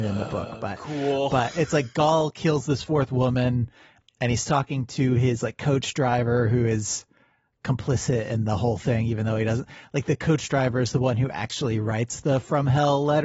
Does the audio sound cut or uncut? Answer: uncut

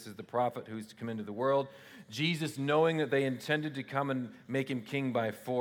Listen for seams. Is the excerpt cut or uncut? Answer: uncut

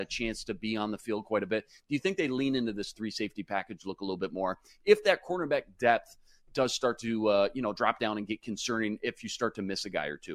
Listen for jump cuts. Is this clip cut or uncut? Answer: uncut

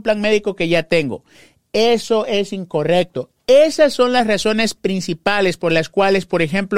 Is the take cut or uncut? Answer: uncut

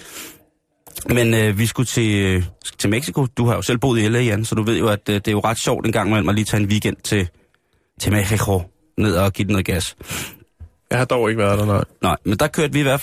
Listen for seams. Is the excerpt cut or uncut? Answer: uncut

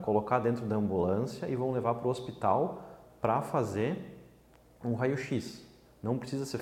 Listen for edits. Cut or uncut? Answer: uncut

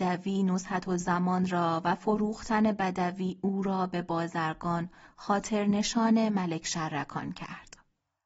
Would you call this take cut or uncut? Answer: uncut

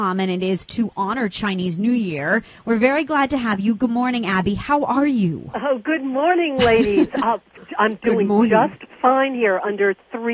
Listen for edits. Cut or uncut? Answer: uncut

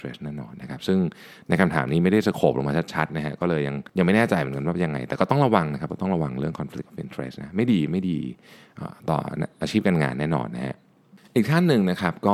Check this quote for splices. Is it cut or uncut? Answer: cut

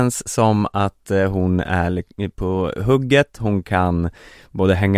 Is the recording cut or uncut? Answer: uncut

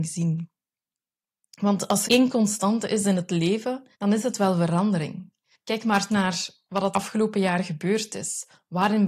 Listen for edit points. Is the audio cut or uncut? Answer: cut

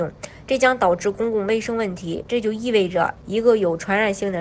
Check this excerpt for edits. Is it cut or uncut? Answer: cut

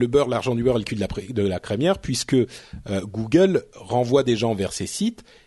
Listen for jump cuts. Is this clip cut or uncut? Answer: uncut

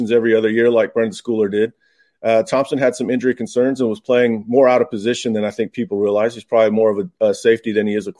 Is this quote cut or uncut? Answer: uncut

